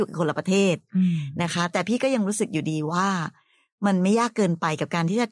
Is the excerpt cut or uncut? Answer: uncut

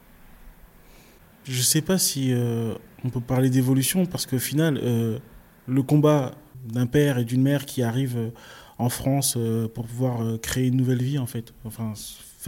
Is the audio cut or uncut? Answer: uncut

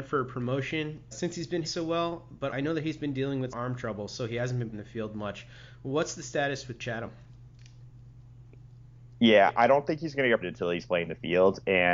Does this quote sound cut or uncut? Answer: cut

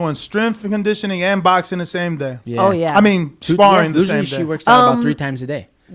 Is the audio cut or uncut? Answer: uncut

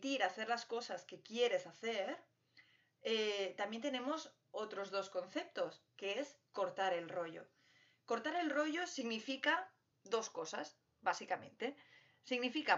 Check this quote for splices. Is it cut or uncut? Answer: uncut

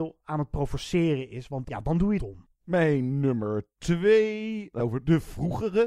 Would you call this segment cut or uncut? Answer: cut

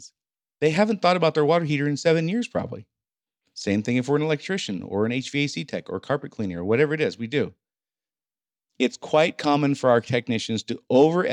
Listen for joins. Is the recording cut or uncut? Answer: uncut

